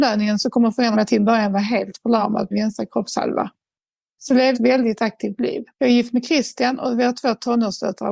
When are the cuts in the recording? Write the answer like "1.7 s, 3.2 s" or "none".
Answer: 0.9 s, 2.5 s, 4.5 s, 5.7 s